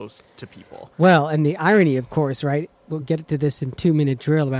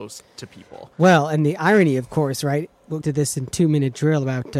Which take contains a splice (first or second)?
second